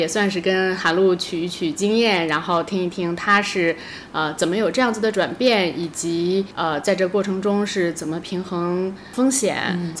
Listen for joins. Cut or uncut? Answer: cut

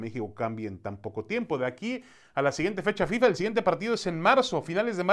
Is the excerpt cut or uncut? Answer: uncut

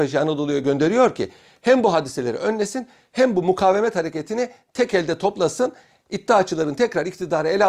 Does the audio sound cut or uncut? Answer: uncut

